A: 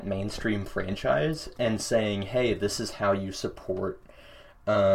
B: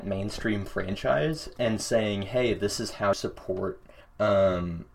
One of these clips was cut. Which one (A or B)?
B